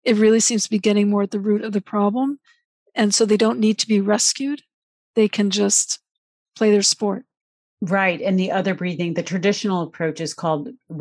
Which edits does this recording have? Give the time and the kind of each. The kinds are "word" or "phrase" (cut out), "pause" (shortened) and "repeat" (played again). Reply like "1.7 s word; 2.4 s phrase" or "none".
none